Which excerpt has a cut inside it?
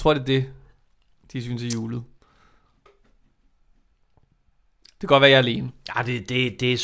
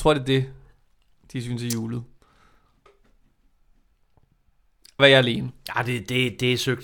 second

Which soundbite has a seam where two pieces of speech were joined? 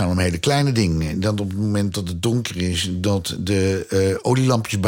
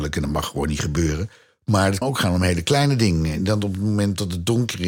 second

